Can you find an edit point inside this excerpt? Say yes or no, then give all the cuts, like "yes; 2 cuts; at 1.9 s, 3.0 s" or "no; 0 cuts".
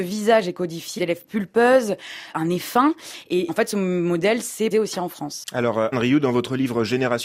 yes; 5 cuts; at 1.0 s, 2.3 s, 3.5 s, 4.7 s, 5.9 s